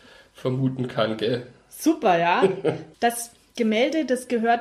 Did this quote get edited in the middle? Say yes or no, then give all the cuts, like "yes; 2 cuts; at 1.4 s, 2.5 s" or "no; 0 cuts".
yes; 1 cut; at 2.9 s